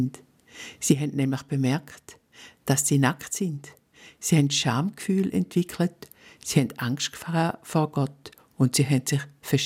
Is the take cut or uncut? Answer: uncut